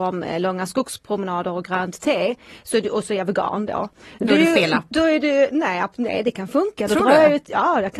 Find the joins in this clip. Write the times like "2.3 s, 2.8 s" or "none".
none